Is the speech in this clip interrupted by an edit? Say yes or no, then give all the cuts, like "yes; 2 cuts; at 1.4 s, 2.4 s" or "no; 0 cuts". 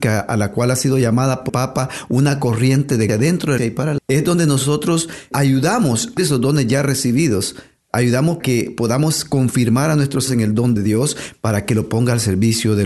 yes; 9 cuts; at 1.5 s, 3.1 s, 3.6 s, 4.0 s, 5.3 s, 6.2 s, 8.4 s, 10.3 s, 10.8 s